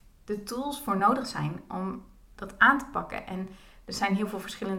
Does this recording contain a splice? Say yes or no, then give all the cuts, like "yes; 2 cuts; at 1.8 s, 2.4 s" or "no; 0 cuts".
no; 0 cuts